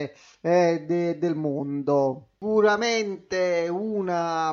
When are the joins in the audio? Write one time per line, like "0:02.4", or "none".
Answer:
none

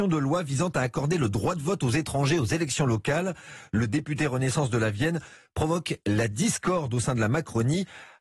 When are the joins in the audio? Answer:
none

